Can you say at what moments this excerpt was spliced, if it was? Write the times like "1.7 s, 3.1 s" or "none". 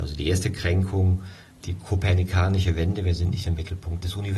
none